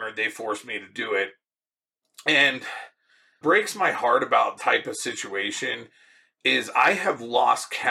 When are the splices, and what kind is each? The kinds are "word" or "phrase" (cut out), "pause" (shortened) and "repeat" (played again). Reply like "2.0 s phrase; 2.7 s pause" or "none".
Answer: 3.4 s word; 4.6 s word

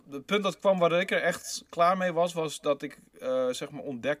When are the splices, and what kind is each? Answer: none

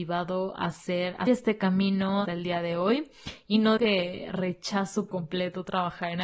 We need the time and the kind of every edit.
1.3 s word; 2.2 s word; 3.8 s word; 5.1 s word

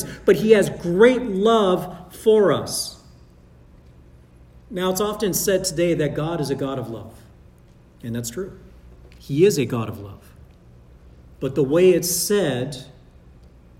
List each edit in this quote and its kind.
none

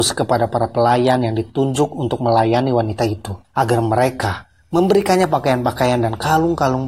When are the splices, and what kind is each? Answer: 3.4 s pause

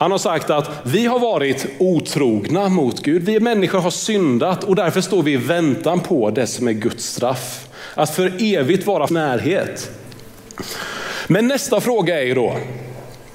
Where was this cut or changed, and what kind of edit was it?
9.1 s phrase

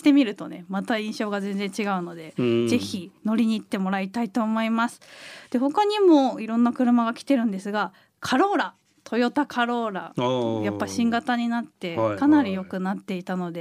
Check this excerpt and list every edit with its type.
none

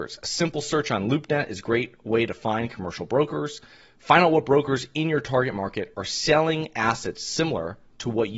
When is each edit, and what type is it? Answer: none

